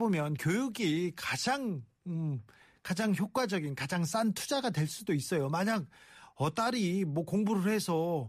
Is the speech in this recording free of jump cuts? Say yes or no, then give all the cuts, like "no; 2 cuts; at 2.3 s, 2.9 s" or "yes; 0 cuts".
yes; 0 cuts